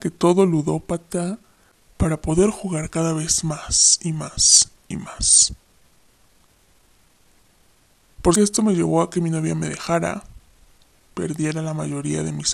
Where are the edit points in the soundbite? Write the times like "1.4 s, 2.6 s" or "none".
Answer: 8.3 s